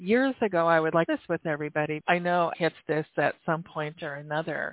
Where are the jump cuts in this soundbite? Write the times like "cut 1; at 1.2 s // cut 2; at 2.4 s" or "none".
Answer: cut 1; at 2.0 s // cut 2; at 2.5 s

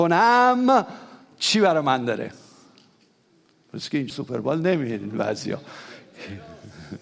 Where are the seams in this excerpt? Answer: cut 1; at 4.1 s

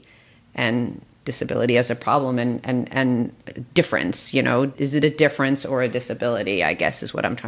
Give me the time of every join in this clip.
cut 1; at 4.7 s

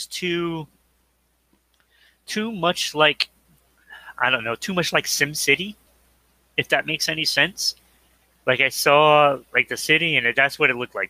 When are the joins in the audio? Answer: none

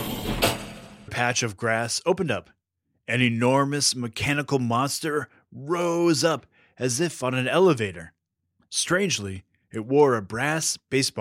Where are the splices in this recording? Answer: cut 1; at 1.1 s

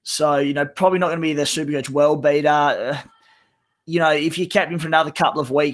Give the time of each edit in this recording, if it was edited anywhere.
none

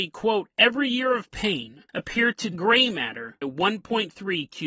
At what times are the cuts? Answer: cut 1; at 1.9 s // cut 2; at 2.5 s // cut 3; at 3.4 s

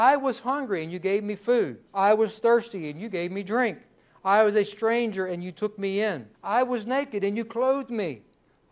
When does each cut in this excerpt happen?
cut 1; at 1.9 s // cut 2; at 6.3 s

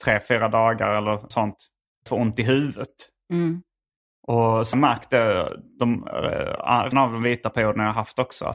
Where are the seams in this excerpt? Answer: cut 1; at 1.3 s // cut 2; at 2.1 s // cut 3; at 4.7 s // cut 4; at 6.9 s

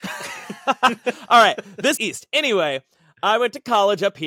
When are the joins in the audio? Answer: cut 1; at 2.0 s

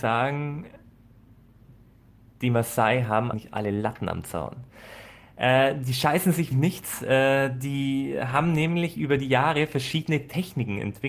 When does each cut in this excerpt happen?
cut 1; at 3.3 s // cut 2; at 6.5 s

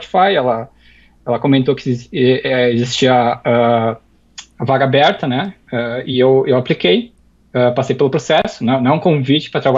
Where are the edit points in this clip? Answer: none

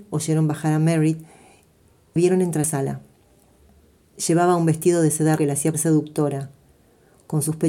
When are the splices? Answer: cut 1; at 2.2 s // cut 2; at 2.6 s // cut 3; at 5.4 s // cut 4; at 5.7 s

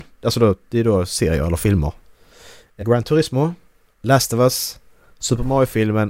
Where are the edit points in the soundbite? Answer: cut 1; at 2.8 s

